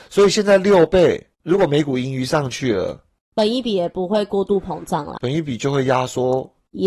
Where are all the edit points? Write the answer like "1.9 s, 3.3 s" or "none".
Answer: 1.3 s, 5.2 s